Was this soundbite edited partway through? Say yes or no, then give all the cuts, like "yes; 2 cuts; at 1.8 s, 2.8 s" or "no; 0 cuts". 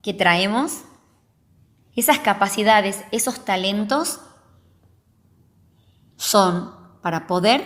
no; 0 cuts